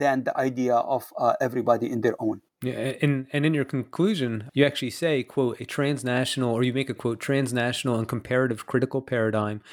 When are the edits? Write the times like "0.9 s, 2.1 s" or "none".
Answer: 2.5 s, 4.5 s, 7.0 s